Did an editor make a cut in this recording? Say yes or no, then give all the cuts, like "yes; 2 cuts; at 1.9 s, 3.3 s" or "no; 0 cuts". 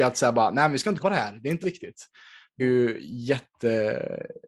yes; 3 cuts; at 1.0 s, 1.6 s, 2.6 s